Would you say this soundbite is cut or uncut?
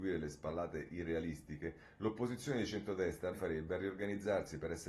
cut